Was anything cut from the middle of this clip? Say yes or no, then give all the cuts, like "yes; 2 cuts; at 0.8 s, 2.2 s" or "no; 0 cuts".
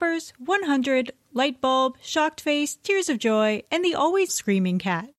yes; 1 cut; at 4.3 s